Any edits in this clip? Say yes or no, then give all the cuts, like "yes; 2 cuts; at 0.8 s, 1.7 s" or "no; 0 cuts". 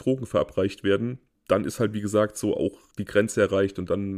no; 0 cuts